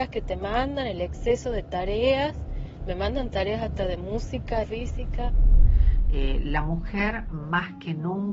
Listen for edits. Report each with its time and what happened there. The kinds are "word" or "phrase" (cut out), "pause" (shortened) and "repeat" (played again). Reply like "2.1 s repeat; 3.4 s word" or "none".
4.6 s phrase